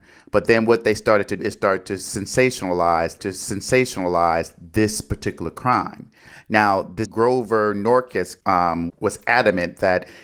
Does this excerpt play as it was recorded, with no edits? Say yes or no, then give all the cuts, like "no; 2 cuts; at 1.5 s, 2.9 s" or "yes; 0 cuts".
no; 5 cuts; at 1.4 s, 3.2 s, 7.0 s, 8.4 s, 8.9 s